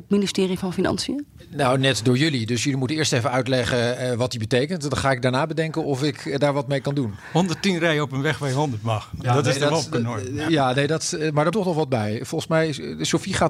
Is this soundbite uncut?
no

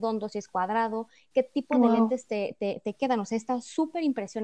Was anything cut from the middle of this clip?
no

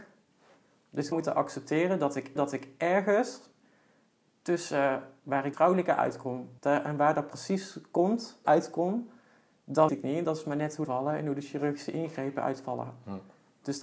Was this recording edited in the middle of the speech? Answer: yes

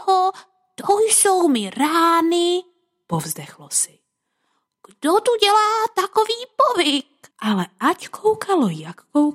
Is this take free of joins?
no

